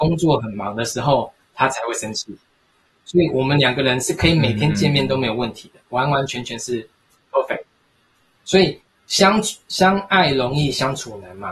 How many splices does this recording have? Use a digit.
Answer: 0